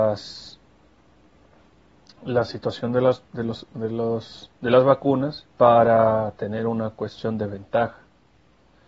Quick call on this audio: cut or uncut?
cut